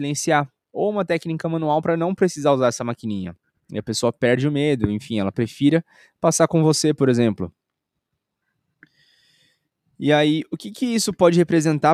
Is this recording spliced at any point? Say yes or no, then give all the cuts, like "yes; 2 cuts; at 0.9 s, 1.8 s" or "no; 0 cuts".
no; 0 cuts